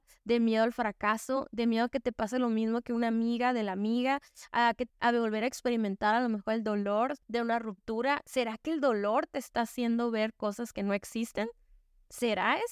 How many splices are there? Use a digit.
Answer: 2